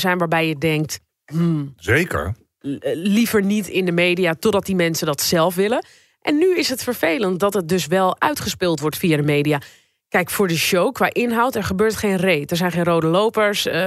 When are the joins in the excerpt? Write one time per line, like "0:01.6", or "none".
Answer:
none